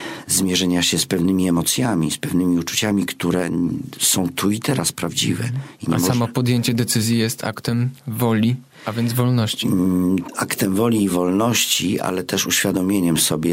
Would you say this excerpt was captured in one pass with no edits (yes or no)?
yes